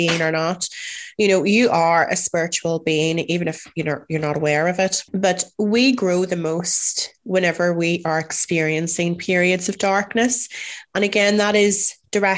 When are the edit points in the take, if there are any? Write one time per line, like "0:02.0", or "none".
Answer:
0:05.1